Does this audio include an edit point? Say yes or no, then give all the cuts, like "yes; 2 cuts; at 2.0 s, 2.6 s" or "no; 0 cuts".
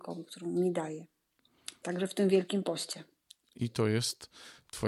no; 0 cuts